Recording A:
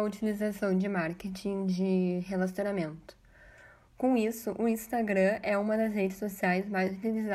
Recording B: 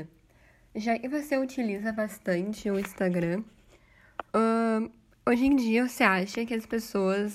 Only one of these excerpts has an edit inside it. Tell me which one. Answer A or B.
B